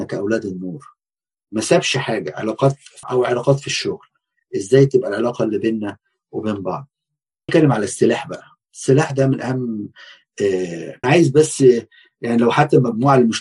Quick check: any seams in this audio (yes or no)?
yes